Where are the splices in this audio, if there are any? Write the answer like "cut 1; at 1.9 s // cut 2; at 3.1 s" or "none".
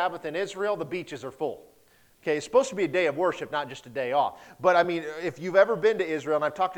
none